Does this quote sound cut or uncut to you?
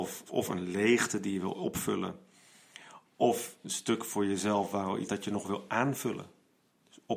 cut